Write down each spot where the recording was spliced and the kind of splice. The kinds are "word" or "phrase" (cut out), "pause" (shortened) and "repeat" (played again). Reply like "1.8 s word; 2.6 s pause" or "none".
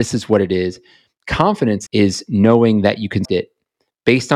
1.9 s word; 3.2 s word